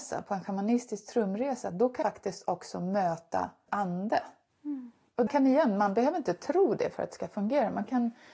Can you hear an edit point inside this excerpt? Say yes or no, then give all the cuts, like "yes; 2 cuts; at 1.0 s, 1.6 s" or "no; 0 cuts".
yes; 3 cuts; at 2.0 s, 3.7 s, 5.3 s